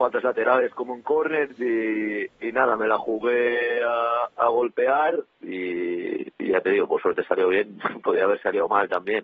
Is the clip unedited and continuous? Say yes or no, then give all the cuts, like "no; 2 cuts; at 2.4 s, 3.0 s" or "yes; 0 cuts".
yes; 0 cuts